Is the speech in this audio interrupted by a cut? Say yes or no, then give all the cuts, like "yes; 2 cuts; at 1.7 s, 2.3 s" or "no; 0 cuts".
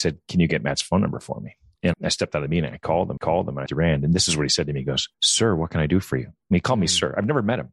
yes; 4 cuts; at 1.9 s, 3.2 s, 3.7 s, 5.1 s